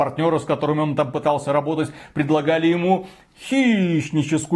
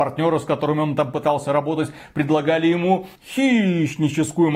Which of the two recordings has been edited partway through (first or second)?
second